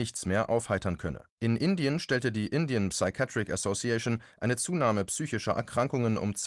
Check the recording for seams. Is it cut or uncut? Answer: cut